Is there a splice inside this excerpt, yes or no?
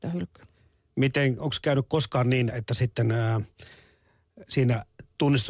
yes